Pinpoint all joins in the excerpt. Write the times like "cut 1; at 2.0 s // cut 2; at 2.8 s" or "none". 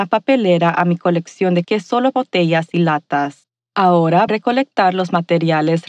cut 1; at 1.6 s // cut 2; at 2.1 s // cut 3; at 4.3 s